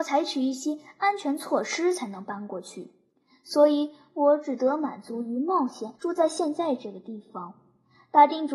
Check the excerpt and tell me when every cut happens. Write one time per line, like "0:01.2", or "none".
0:06.0